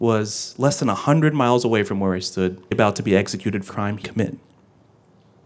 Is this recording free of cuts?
no; 3 cuts; at 2.7 s, 3.7 s, 4.0 s

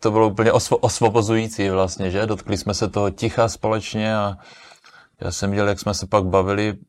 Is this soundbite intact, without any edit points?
yes; 0 cuts

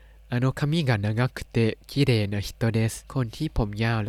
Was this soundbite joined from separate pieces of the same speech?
yes; 1 cut; at 3.0 s

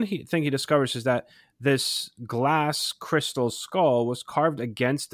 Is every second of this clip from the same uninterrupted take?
yes; 0 cuts

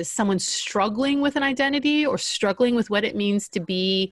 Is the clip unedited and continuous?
yes; 0 cuts

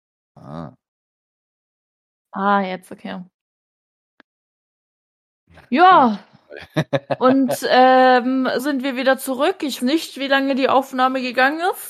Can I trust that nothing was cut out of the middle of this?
no; 2 cuts; at 8.6 s, 9.8 s

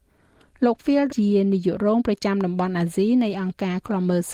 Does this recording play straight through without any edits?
no; 1 cut; at 1.1 s

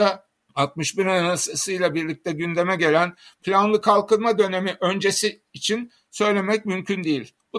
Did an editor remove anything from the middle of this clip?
no; 0 cuts

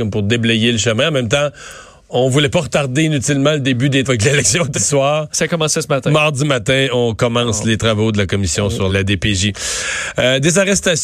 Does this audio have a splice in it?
yes; 3 cuts; at 4.1 s, 4.7 s, 8.9 s

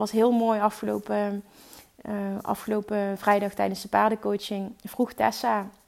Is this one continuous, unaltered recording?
yes; 0 cuts

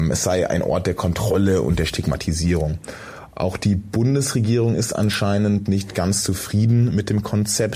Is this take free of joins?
yes; 0 cuts

